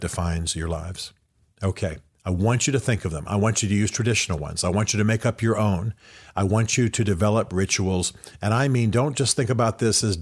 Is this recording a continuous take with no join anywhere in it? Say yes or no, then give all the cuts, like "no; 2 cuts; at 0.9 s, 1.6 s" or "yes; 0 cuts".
yes; 0 cuts